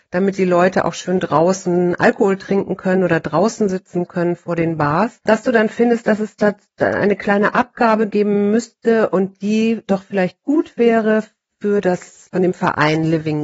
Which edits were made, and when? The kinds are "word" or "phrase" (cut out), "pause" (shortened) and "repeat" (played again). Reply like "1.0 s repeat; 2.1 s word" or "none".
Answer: 12.3 s word